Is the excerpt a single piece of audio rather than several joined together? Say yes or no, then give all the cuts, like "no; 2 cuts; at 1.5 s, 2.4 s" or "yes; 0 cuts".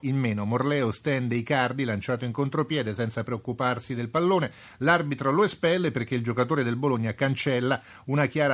yes; 0 cuts